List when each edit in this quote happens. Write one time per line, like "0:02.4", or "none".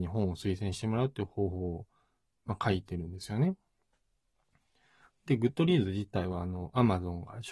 none